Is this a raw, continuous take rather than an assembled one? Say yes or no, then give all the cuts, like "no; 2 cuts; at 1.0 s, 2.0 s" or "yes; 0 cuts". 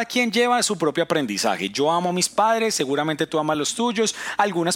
yes; 0 cuts